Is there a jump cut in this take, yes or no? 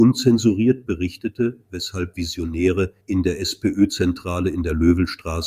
yes